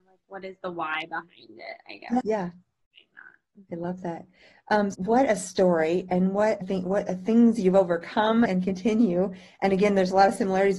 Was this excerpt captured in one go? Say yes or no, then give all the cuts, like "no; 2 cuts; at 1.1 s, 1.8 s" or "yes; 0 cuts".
no; 4 cuts; at 2.2 s, 4.9 s, 6.6 s, 8.5 s